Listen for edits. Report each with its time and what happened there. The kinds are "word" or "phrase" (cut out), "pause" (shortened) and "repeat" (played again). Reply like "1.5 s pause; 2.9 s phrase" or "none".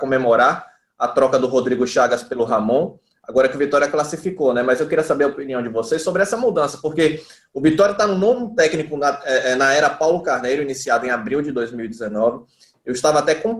none

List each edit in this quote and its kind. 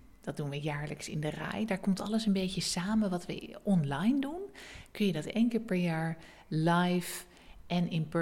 none

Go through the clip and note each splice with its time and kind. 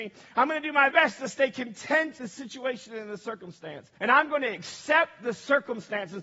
0.9 s word; 2.2 s word; 4.0 s pause

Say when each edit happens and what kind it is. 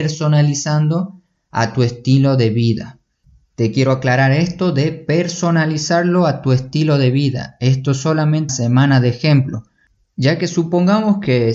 8.5 s phrase

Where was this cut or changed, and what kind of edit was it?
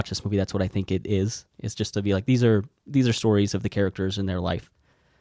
1.5 s pause

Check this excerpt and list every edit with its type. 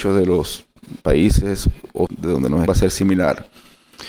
1.0 s pause; 2.1 s word; 2.7 s word

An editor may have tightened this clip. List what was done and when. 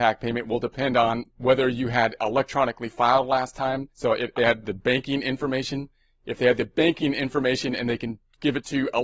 3.9 s pause; 4.4 s phrase

